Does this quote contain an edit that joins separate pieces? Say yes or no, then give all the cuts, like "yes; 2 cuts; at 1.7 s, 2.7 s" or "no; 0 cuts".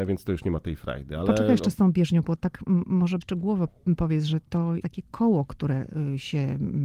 yes; 3 cuts; at 2.2 s, 3.2 s, 4.8 s